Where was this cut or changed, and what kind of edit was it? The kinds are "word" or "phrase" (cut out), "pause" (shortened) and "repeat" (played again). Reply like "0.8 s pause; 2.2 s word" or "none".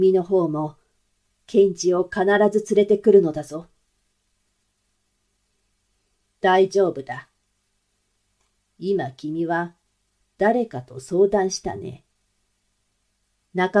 none